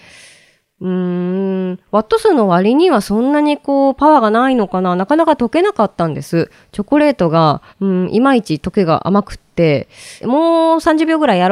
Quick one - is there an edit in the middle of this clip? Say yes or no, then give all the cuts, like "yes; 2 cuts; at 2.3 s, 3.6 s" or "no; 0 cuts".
yes; 2 cuts; at 7.7 s, 10.2 s